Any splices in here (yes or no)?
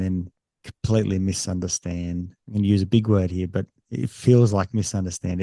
yes